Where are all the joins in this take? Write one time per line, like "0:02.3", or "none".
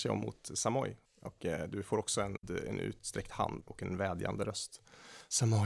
0:01.1

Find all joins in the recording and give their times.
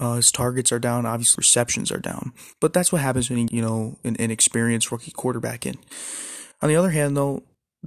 0:01.3
0:03.5

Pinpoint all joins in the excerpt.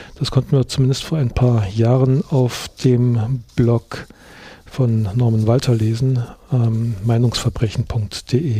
none

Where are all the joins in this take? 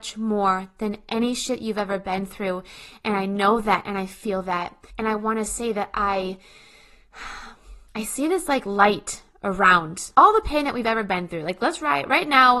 0:04.9
0:07.9
0:10.1

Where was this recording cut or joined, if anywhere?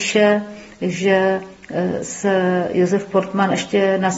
none

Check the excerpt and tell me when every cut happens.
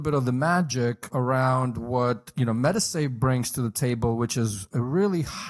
0:01.1

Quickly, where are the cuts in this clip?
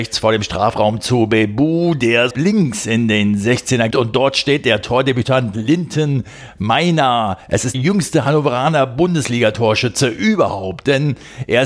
0:02.3
0:03.9
0:07.4
0:07.7

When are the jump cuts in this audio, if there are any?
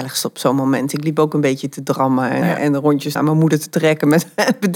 0:02.4
0:03.2

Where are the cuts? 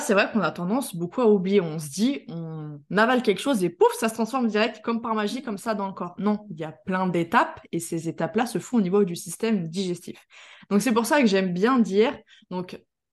none

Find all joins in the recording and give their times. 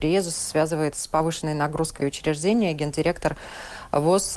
0:00.9
0:02.0

